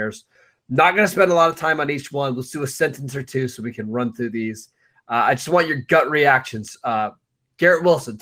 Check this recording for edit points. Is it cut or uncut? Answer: uncut